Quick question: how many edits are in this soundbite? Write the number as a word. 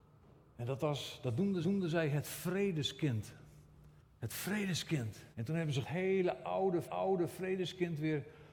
five